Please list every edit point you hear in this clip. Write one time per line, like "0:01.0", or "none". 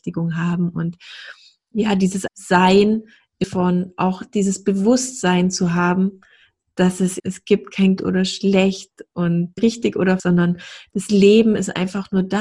0:02.3
0:03.4
0:07.2
0:08.0
0:09.6
0:10.2